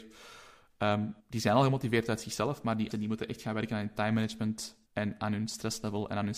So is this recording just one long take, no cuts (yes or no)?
no